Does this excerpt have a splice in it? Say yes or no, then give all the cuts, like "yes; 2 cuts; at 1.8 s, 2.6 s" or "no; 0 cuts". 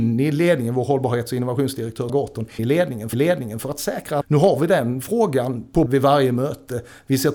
yes; 5 cuts; at 2.1 s, 2.6 s, 3.1 s, 4.2 s, 5.9 s